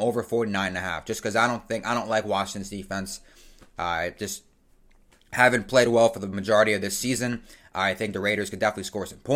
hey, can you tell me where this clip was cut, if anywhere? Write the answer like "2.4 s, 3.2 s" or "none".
none